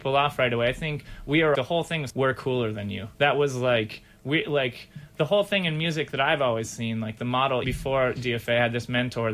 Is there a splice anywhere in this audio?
yes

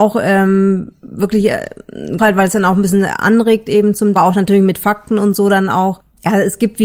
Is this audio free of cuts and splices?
no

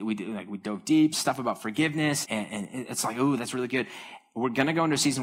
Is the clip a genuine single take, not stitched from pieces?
no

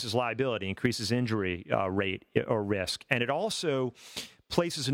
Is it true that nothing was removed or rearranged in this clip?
yes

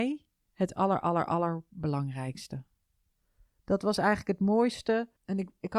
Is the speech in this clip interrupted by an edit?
no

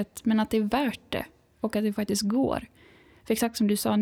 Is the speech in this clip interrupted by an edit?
no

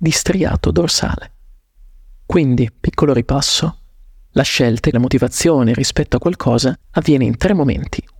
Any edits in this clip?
yes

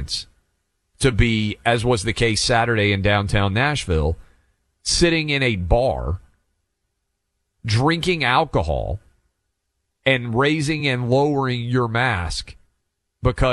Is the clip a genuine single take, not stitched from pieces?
yes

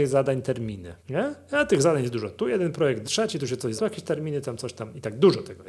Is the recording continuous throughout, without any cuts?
no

